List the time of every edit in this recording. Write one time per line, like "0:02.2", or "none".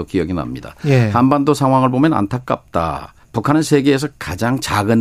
0:03.2